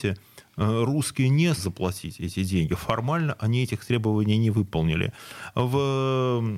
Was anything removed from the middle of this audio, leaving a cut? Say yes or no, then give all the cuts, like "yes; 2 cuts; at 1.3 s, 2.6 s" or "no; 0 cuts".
yes; 1 cut; at 1.6 s